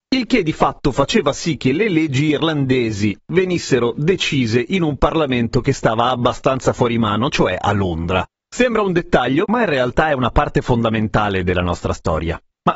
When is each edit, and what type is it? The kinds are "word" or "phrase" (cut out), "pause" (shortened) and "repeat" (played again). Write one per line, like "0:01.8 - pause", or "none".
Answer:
none

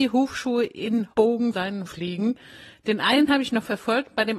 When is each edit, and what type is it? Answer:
0:01.1 - word
0:01.5 - word
0:01.9 - word

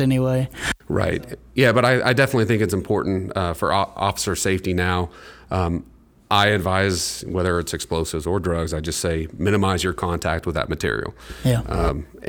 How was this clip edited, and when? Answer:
none

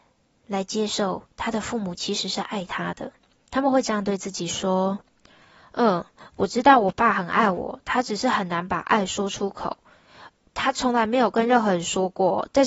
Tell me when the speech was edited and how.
none

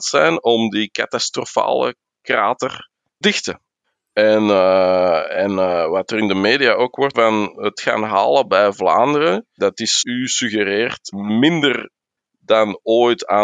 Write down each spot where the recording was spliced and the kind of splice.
0:03.2 - word
0:07.1 - word
0:07.8 - word
0:09.6 - word
0:10.0 - word
0:11.1 - word

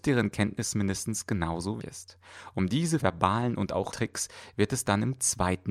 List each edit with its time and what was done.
0:01.8 - word
0:03.0 - word
0:03.9 - word

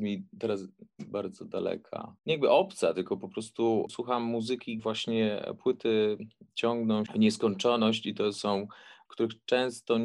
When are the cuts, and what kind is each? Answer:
0:03.9 - word
0:04.8 - word
0:07.1 - word
0:09.1 - word

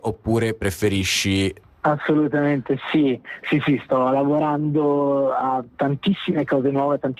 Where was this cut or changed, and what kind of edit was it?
none

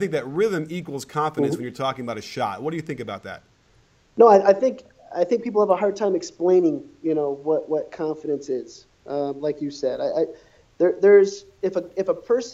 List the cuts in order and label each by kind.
none

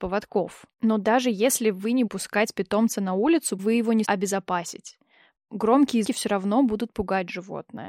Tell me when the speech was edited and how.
0:02.1 - word
0:03.6 - word
0:04.0 - word
0:06.0 - word

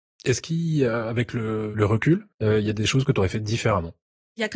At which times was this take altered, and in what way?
0:02.3 - pause

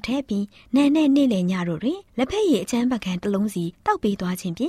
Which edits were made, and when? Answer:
0:02.1 - pause
0:03.7 - pause

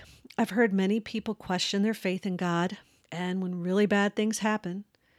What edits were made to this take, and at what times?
0:03.0 - pause

